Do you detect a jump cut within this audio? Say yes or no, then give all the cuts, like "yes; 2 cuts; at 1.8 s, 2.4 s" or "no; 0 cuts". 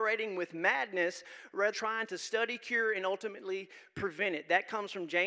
yes; 1 cut; at 1.7 s